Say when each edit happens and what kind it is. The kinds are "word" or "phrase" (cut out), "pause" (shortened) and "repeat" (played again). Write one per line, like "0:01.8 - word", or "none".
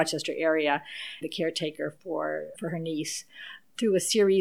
0:01.2 - phrase
0:02.5 - word